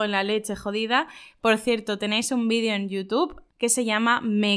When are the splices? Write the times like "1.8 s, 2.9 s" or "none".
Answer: none